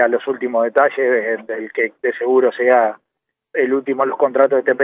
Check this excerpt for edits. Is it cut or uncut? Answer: cut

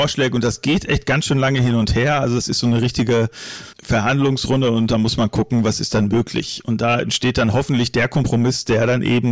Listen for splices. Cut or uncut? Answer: cut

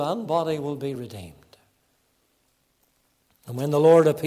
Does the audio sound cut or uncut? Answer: uncut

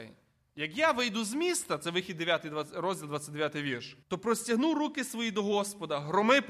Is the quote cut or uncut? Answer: cut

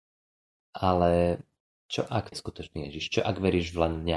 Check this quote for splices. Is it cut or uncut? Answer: cut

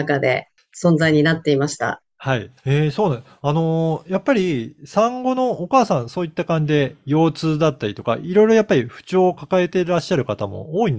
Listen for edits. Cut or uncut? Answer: cut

